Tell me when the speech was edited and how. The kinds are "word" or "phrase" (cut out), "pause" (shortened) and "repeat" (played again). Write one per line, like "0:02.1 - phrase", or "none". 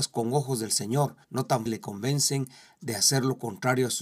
0:01.2 - pause
0:01.7 - word